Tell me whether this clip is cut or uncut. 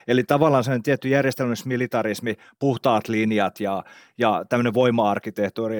uncut